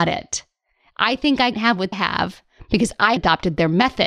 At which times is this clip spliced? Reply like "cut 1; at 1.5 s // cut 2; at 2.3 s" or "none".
cut 1; at 1.5 s // cut 2; at 1.9 s // cut 3; at 3.2 s